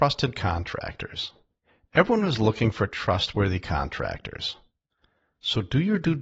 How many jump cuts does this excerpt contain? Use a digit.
0